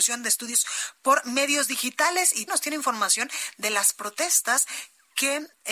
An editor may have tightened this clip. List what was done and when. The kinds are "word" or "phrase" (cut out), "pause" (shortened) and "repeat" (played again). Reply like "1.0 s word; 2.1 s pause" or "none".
2.5 s word